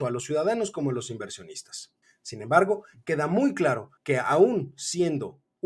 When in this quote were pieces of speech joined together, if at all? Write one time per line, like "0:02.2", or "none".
0:02.0
0:04.0